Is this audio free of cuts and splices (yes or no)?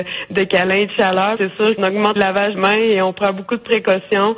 no